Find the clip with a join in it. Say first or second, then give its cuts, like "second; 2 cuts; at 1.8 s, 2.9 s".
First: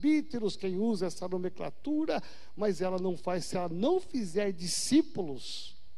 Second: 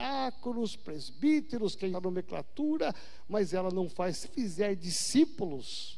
second; 2 cuts; at 1.9 s, 4.2 s